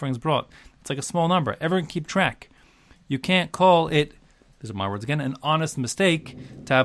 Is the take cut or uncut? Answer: uncut